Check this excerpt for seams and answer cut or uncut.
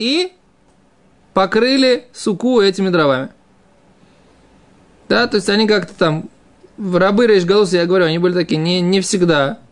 uncut